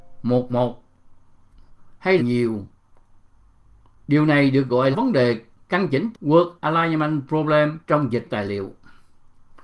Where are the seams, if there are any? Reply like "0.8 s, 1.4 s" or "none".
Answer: 2.2 s, 4.9 s, 5.5 s, 6.1 s, 6.6 s, 7.8 s, 8.2 s

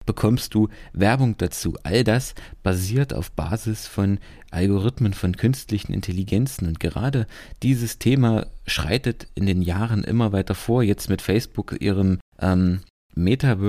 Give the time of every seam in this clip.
12.3 s

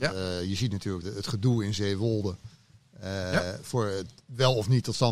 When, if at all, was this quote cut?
1.0 s

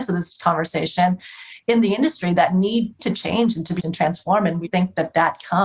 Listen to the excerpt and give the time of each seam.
3.0 s, 3.8 s, 4.7 s

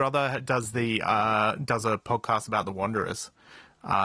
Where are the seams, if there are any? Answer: none

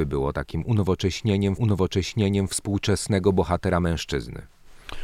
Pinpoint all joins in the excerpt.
1.6 s

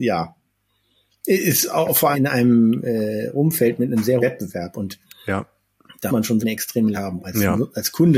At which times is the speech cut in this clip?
2.1 s, 4.2 s, 6.1 s, 6.4 s, 6.9 s, 7.2 s

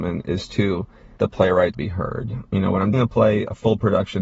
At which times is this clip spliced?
1.2 s, 1.7 s, 2.9 s

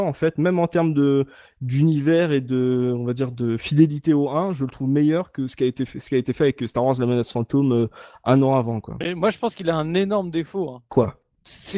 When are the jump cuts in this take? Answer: none

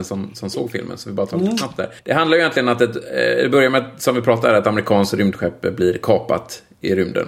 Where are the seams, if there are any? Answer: 2.0 s

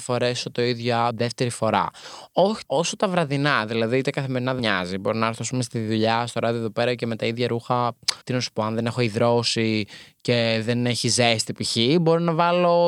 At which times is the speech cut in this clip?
1.1 s, 2.6 s, 4.6 s, 8.2 s

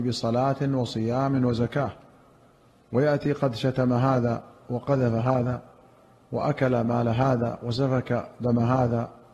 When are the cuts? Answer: none

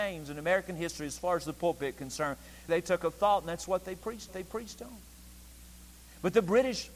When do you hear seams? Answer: 2.7 s, 4.3 s

